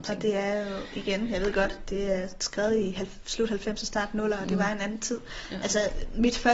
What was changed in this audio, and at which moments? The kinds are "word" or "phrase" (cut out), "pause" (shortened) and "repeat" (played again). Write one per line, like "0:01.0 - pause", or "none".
none